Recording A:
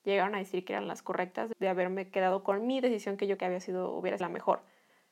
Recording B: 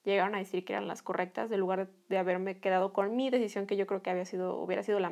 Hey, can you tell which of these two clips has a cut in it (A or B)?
A